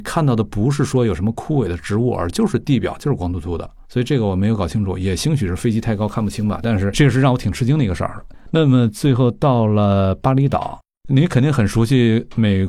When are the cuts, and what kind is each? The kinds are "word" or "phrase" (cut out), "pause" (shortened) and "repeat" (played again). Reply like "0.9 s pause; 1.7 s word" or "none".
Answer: 3.8 s pause